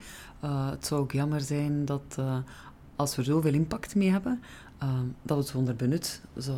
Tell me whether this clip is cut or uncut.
uncut